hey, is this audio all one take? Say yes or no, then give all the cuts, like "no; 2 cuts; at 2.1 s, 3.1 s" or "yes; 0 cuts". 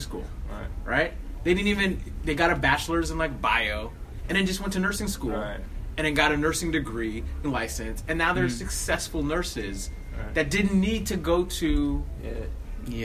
no; 1 cut; at 7.4 s